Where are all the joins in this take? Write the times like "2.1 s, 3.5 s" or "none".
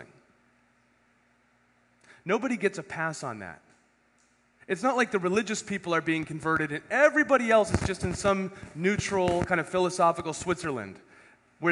none